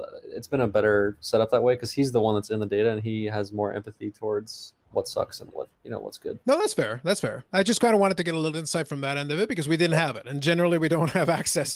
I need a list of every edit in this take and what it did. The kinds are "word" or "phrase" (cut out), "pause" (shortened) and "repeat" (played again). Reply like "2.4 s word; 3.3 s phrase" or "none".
4.8 s pause; 5.7 s pause; 6.4 s pause